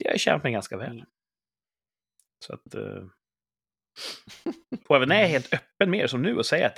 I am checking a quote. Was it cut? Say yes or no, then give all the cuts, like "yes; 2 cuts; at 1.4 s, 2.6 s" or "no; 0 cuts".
no; 0 cuts